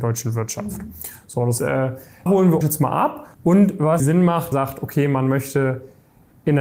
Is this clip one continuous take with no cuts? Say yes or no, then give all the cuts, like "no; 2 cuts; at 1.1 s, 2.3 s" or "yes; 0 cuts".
no; 6 cuts; at 1.6 s, 2.3 s, 2.6 s, 3.3 s, 4.0 s, 4.5 s